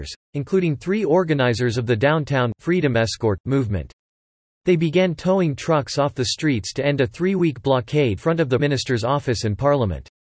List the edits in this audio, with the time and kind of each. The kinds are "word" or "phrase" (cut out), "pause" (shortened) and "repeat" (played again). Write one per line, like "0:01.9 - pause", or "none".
0:08.2 - word
0:08.6 - word